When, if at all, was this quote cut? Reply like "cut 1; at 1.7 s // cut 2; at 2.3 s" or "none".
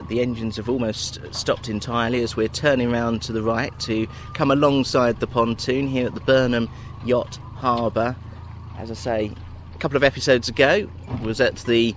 none